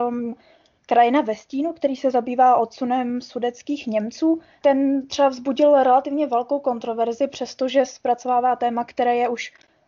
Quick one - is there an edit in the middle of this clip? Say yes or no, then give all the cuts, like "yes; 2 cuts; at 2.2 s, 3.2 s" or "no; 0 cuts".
yes; 1 cut; at 4.6 s